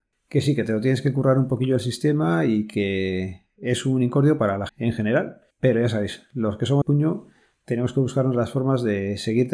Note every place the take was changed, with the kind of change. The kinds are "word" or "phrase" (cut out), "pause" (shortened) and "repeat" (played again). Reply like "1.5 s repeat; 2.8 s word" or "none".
4.7 s word; 5.5 s pause; 6.8 s phrase